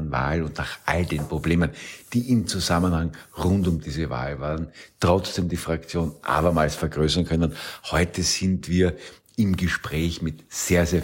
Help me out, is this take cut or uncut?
uncut